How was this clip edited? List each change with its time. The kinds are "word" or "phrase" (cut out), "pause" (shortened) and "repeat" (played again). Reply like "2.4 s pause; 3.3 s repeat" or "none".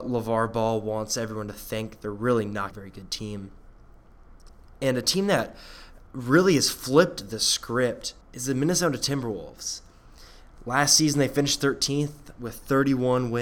2.7 s phrase; 6.1 s pause; 8.2 s pause